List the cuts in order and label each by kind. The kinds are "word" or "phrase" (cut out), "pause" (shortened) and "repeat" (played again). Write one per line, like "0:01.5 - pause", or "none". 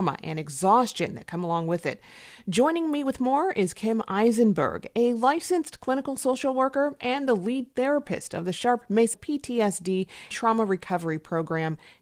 0:09.1 - word
0:10.3 - word